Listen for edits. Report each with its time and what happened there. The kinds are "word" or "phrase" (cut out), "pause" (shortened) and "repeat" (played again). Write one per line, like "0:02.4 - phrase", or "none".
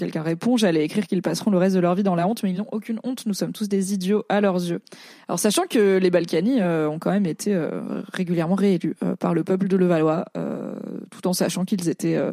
none